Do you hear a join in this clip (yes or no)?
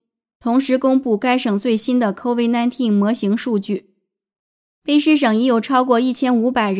no